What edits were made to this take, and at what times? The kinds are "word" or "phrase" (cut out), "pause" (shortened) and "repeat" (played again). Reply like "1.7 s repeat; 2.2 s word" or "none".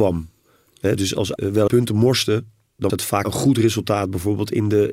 1.0 s word; 1.4 s word; 1.7 s word; 2.9 s word; 3.2 s word